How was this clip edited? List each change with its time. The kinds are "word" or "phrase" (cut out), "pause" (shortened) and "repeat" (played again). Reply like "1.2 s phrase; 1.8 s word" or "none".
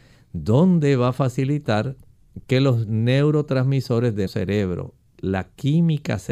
4.3 s word